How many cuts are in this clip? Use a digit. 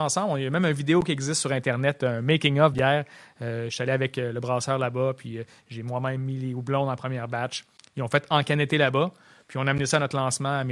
1